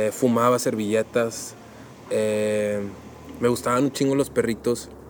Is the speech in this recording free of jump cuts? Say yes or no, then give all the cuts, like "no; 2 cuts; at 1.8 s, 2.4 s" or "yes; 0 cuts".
yes; 0 cuts